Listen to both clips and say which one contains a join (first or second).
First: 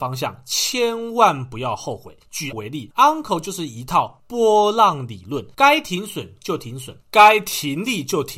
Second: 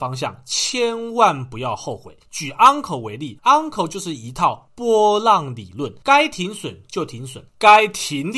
first